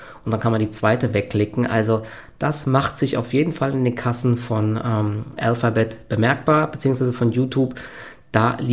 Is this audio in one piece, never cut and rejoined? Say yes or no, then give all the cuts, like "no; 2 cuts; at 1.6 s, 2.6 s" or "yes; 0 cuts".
yes; 0 cuts